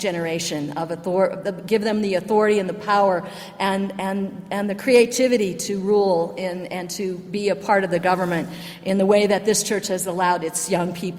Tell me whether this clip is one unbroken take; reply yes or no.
yes